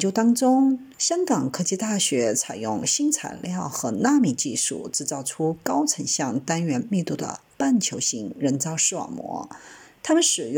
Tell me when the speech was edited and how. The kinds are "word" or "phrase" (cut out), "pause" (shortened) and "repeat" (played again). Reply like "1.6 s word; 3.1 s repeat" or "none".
0.9 s pause